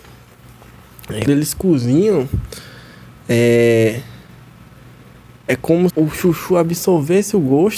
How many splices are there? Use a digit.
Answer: 2